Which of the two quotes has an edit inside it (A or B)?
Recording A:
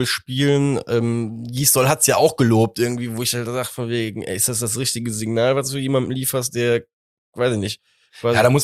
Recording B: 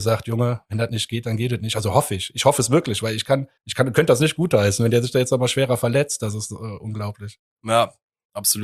B